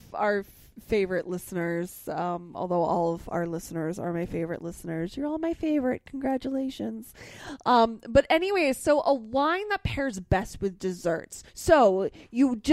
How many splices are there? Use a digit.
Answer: 1